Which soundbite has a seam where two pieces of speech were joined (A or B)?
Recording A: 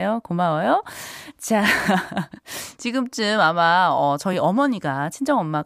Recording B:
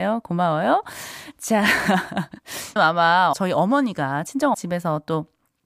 B